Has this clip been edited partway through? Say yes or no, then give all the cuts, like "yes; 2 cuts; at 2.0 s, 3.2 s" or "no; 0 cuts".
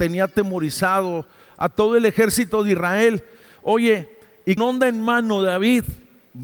yes; 1 cut; at 4.6 s